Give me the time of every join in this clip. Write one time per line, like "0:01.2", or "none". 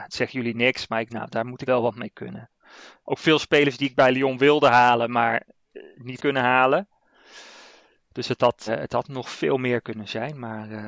0:01.1
0:01.7
0:06.2
0:08.7